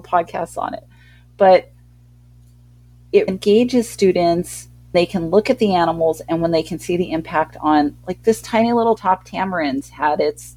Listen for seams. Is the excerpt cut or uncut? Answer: cut